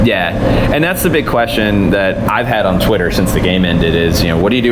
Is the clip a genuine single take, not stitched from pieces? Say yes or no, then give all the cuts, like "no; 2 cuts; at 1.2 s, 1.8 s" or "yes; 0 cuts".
yes; 0 cuts